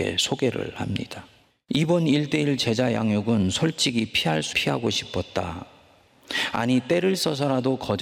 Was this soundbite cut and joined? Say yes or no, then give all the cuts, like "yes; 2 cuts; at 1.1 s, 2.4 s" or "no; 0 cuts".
yes; 1 cut; at 4.5 s